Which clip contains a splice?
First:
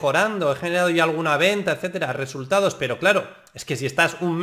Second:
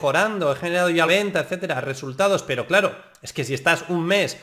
second; 1 cut; at 1.1 s

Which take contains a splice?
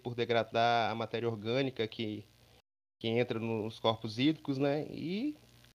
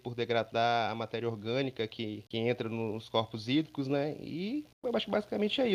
second; 2 cuts; at 2.3 s, 4.7 s

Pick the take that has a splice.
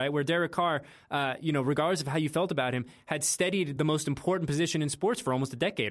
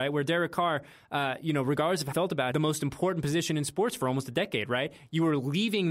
second; 2 cuts; at 2.1 s, 2.5 s

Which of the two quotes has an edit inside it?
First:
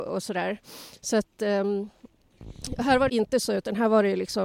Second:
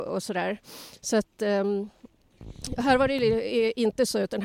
first; 1 cut; at 3.1 s

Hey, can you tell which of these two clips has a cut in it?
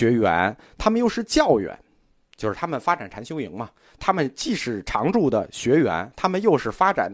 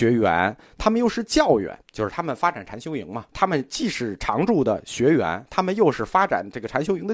second; 2 cuts; at 1.8 s, 3.3 s

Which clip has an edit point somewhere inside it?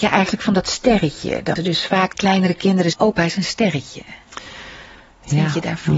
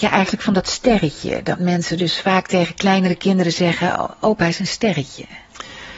first; 3 cuts; at 1.6 s, 2.1 s, 2.9 s

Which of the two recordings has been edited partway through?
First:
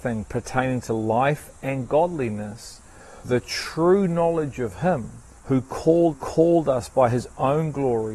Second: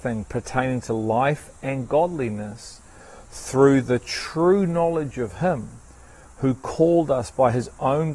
first; 3 cuts; at 3.2 s, 5.4 s, 6.1 s

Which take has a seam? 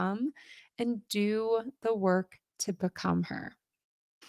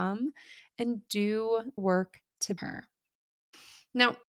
second; 2 cuts; at 1.8 s, 2.6 s

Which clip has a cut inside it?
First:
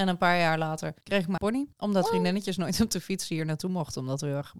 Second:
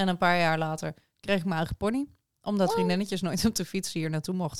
first; 3 cuts; at 1.0 s, 1.4 s, 1.7 s

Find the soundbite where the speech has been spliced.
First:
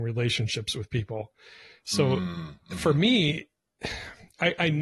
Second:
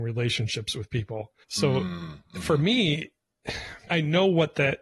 second; 2 cuts; at 1.4 s, 3.9 s

